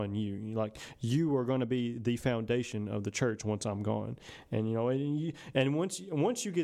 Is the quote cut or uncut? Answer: uncut